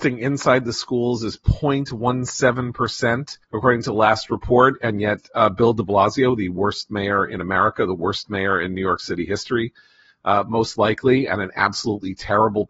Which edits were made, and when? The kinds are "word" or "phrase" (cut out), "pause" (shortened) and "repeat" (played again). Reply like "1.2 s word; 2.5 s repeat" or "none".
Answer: 3.4 s pause